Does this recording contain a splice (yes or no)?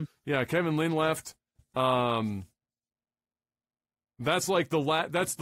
no